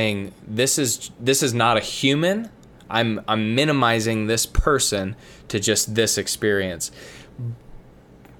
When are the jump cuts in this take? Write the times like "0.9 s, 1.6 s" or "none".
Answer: none